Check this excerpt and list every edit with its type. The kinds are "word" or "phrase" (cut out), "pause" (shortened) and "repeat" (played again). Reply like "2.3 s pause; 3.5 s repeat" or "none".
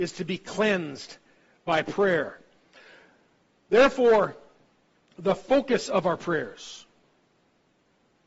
none